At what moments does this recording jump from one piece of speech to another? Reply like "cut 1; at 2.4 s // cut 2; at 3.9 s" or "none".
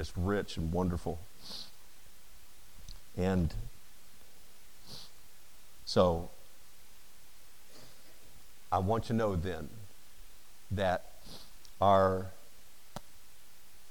cut 1; at 9.0 s

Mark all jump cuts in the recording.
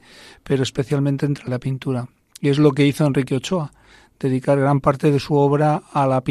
cut 1; at 1.5 s

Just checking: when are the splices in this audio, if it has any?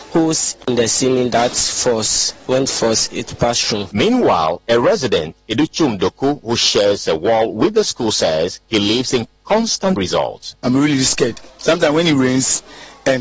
cut 1; at 2.7 s // cut 2; at 8.6 s // cut 3; at 10.0 s // cut 4; at 11.5 s

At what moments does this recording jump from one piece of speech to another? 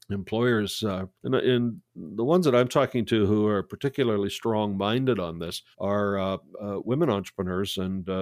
cut 1; at 1.1 s // cut 2; at 5.7 s

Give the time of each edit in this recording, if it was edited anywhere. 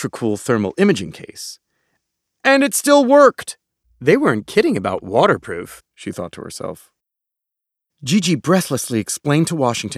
none

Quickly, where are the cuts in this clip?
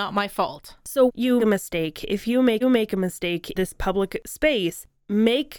cut 1; at 1.1 s // cut 2; at 1.4 s // cut 3; at 2.6 s // cut 4; at 3.5 s

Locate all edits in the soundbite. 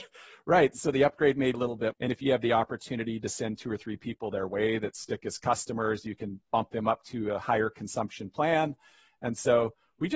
cut 1; at 1.5 s // cut 2; at 1.9 s

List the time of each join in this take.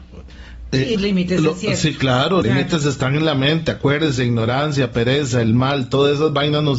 cut 1; at 0.9 s // cut 2; at 2.4 s

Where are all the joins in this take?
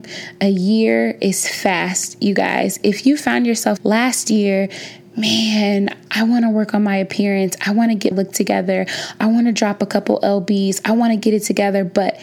cut 1; at 3.8 s // cut 2; at 6.1 s // cut 3; at 8.1 s

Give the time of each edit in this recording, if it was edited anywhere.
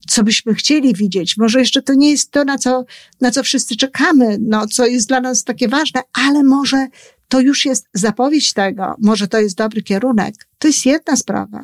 none

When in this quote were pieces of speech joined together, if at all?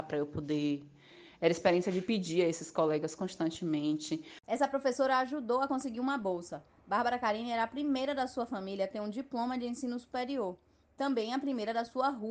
none

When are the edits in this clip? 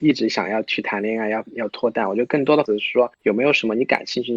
cut 1; at 2.7 s // cut 2; at 3.1 s

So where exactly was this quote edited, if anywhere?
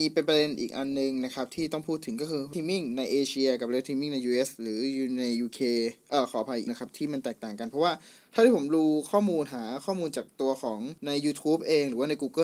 cut 1; at 2.5 s // cut 2; at 6.7 s // cut 3; at 11.0 s

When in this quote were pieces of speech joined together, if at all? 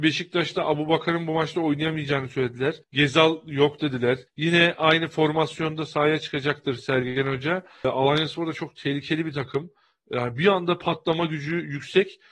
cut 1; at 2.8 s // cut 2; at 4.3 s

